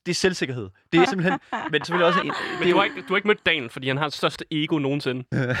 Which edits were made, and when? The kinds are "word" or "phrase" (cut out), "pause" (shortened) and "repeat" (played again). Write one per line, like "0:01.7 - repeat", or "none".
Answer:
0:01.1 - word
0:01.8 - word
0:02.2 - word